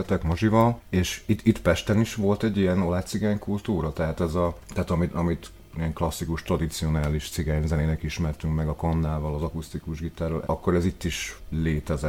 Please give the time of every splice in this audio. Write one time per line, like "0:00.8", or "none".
none